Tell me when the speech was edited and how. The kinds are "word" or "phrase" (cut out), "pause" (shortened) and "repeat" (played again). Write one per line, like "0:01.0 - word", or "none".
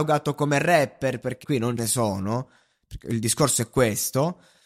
0:01.4 - word
0:01.8 - word

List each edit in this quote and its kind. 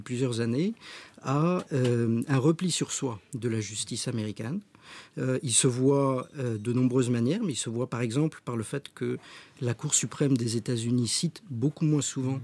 0:03.2 - pause

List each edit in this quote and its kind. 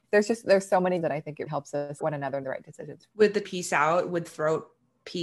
0:01.0 - word
0:01.5 - word
0:02.0 - word
0:02.4 - word
0:03.1 - word
0:03.4 - word
0:04.3 - word

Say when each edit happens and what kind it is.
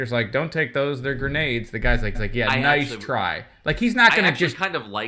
0:02.1 - repeat

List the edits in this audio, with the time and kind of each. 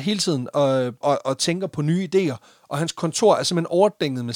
0:01.0 - word

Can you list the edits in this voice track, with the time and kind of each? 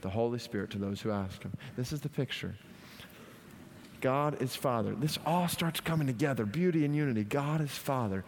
none

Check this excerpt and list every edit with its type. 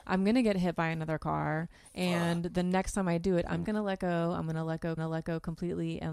0:03.6 - word
0:05.0 - repeat

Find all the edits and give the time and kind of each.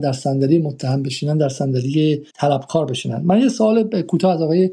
0:02.3 - pause

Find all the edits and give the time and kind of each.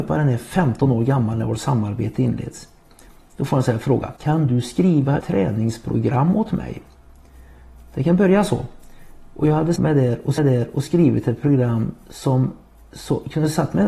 0:04.2 - pause
0:05.2 - phrase
0:09.8 - word
0:10.4 - repeat

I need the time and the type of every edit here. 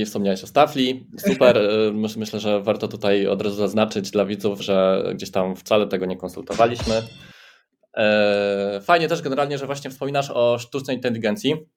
0:04.6 - word

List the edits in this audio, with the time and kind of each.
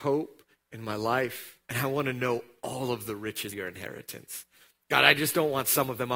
0:01.6 - pause
0:03.5 - word

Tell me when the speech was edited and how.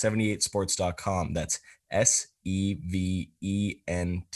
none

